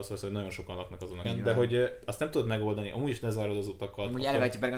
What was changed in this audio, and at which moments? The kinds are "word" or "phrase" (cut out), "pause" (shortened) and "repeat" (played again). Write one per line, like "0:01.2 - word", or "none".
0:01.2 - word